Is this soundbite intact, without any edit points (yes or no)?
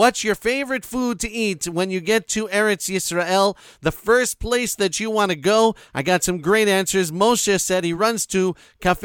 yes